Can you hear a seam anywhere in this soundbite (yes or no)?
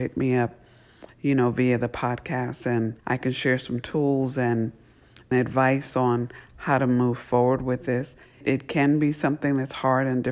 yes